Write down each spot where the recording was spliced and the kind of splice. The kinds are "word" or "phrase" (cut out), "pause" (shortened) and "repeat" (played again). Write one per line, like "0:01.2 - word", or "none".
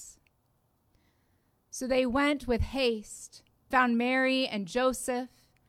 0:03.7 - word